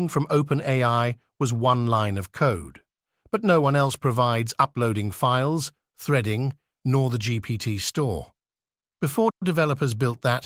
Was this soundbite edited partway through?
no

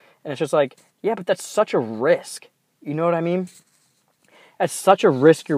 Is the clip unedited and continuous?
yes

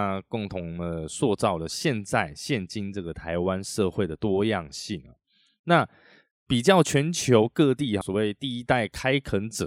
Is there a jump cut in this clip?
yes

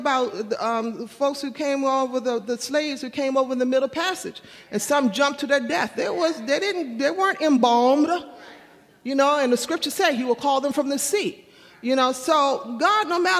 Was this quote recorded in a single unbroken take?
yes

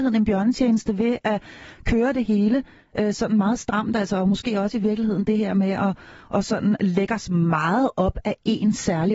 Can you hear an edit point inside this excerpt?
no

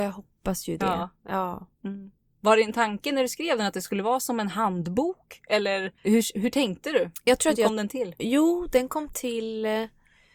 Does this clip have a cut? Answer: yes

